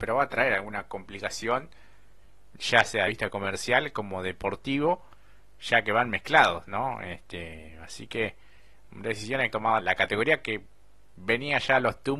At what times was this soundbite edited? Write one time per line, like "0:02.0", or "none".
0:03.1
0:08.8
0:09.5
0:09.8

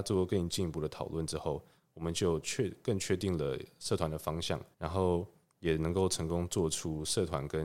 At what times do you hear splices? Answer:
0:04.7

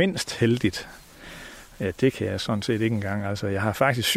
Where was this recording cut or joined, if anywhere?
none

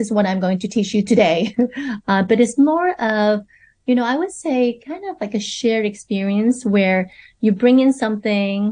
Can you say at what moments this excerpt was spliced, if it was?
none

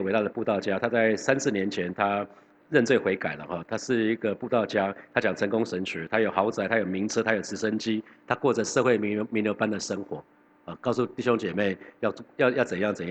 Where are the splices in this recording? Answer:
none

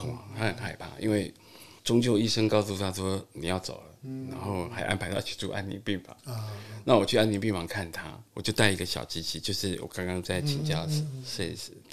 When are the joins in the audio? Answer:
0:01.8
0:08.3

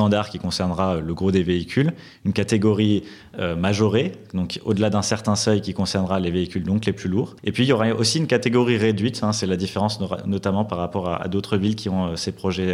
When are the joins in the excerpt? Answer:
0:07.4

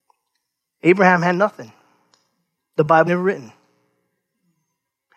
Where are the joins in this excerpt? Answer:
0:03.1

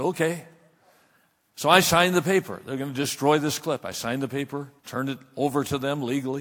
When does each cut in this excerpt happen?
0:04.8

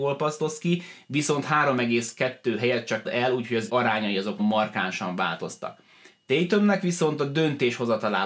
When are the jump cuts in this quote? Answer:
0:03.0
0:03.7
0:04.4

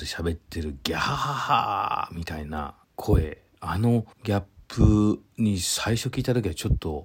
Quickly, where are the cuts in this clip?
0:02.8
0:04.1

